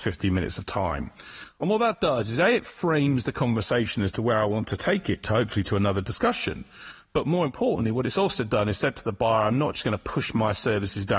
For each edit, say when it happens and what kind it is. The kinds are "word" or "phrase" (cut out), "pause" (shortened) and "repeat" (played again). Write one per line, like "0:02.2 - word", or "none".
none